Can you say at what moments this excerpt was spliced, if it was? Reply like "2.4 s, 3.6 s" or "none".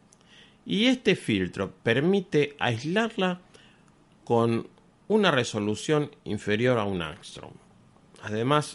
1.8 s